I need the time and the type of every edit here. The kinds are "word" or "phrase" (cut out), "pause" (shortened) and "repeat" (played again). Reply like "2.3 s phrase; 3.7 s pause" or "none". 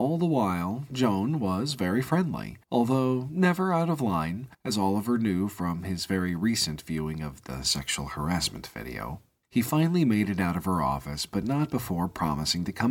2.6 s pause; 4.5 s pause